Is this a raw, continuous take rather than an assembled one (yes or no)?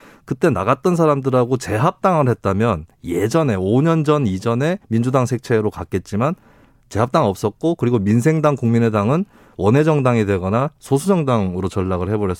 no